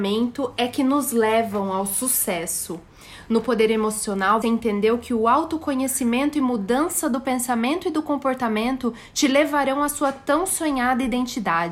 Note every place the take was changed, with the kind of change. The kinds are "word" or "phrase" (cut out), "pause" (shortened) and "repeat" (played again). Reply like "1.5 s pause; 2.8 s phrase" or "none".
4.4 s word